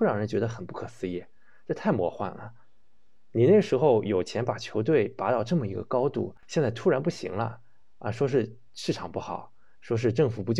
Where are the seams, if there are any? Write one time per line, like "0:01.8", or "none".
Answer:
0:06.4